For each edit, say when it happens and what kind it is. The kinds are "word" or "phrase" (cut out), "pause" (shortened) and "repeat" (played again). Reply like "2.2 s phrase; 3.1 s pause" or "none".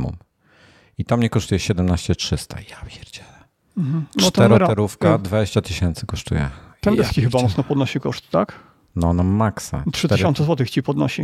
none